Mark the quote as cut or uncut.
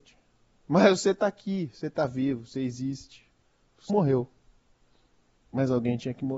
cut